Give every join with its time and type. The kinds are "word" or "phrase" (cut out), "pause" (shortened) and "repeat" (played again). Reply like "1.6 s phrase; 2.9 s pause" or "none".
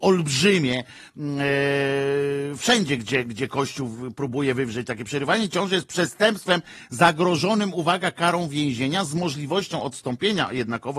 none